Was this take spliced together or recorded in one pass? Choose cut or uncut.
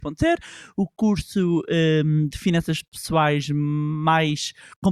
uncut